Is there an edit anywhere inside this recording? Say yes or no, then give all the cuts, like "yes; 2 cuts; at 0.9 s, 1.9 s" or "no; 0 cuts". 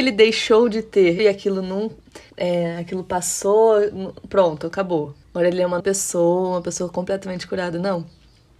yes; 4 cuts; at 1.2 s, 2.3 s, 5.2 s, 5.8 s